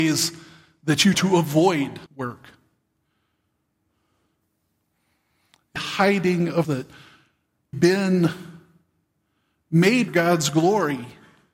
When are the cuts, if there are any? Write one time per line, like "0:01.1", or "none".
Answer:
0:01.1
0:02.1
0:05.8
0:06.6
0:07.7
0:10.1